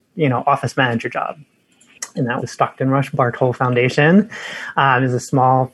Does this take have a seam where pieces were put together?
yes; 1 cut; at 2.4 s

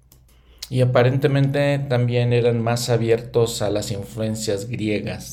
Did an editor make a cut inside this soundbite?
no; 0 cuts

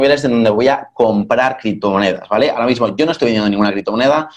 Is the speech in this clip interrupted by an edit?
no; 0 cuts

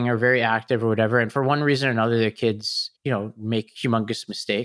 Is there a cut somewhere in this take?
yes; 1 cut; at 3.0 s

